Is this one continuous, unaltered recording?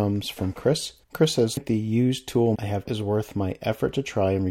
no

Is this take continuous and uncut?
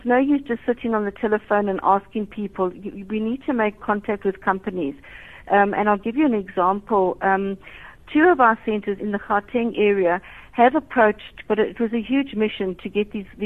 no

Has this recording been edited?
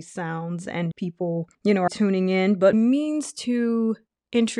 yes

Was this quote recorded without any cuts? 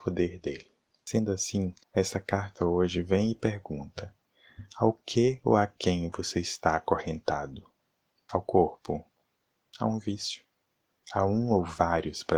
yes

